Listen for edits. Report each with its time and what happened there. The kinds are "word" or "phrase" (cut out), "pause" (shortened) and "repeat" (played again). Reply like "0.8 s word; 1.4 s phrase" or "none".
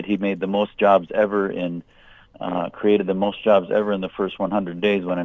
none